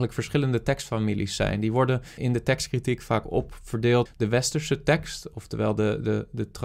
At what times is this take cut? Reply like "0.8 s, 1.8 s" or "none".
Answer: 2.2 s, 4.1 s